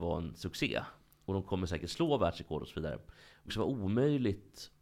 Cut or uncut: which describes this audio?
cut